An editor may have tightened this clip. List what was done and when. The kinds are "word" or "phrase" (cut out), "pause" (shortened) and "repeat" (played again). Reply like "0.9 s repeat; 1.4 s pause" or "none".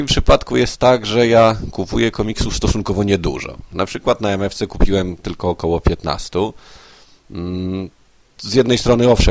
none